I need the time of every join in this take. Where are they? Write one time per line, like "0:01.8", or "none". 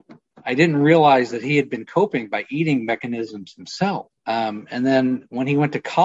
0:04.2

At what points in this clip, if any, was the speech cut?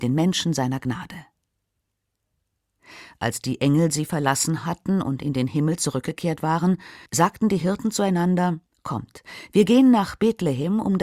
0:07.1
0:08.7

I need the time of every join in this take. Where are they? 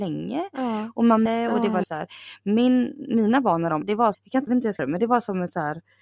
0:01.3
0:01.8
0:03.8
0:04.1
0:04.5
0:04.8

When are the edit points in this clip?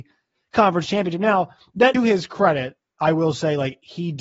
0:01.9

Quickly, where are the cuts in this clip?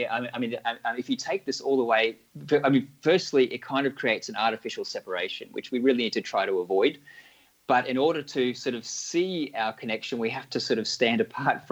none

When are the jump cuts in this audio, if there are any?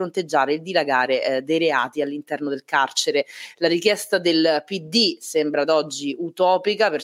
none

